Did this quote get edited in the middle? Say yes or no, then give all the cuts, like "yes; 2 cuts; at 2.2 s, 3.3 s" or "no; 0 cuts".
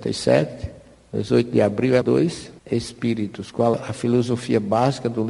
yes; 3 cuts; at 2.0 s, 2.6 s, 3.7 s